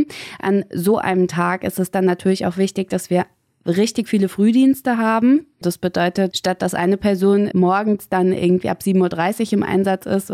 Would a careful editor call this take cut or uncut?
cut